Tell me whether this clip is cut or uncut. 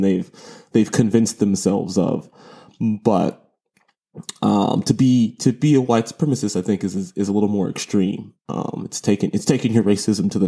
uncut